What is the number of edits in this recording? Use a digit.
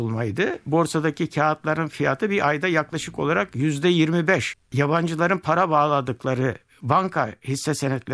0